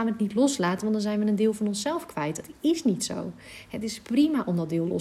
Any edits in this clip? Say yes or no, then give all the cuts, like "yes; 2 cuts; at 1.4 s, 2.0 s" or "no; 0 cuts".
no; 0 cuts